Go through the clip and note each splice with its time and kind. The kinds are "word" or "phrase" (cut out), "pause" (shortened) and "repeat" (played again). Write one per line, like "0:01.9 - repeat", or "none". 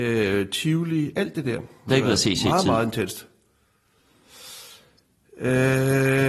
0:01.9 - phrase